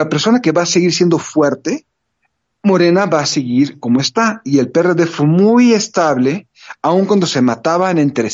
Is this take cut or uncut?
cut